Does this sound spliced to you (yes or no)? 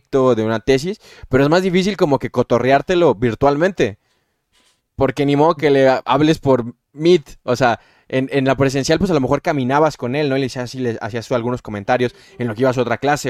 no